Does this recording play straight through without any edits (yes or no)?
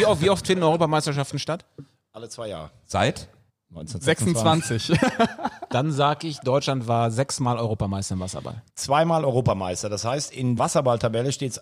no